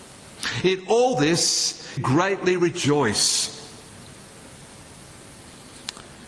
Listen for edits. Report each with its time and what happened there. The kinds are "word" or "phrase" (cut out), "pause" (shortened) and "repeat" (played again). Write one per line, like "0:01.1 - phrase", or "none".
0:02.0 - word